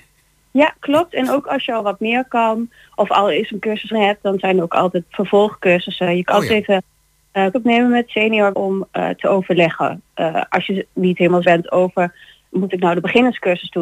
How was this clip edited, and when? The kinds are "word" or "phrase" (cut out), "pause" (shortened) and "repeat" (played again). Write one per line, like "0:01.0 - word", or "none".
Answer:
0:03.9 - word
0:05.0 - word
0:06.3 - word
0:07.5 - word
0:08.5 - word
0:11.4 - word